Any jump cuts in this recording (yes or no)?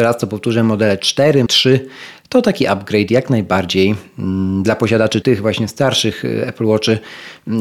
yes